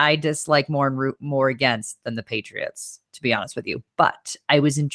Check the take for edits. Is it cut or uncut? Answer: uncut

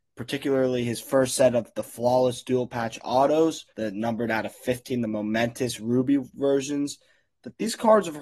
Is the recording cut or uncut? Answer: cut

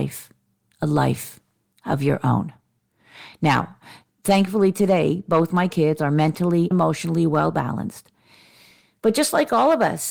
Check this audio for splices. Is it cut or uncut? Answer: cut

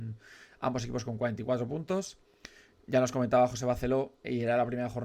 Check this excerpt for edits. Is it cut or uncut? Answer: uncut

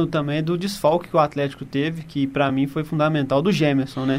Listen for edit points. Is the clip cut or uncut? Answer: uncut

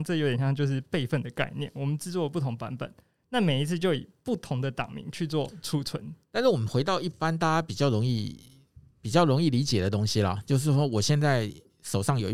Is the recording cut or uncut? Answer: cut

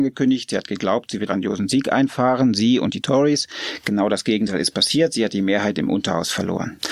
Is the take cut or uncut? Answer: cut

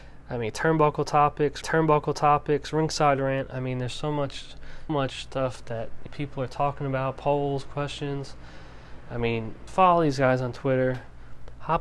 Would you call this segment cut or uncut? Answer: cut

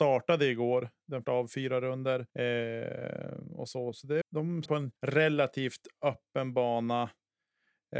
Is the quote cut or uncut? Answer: cut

